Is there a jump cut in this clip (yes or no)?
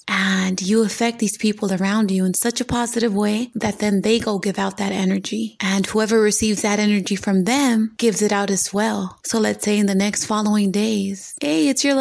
no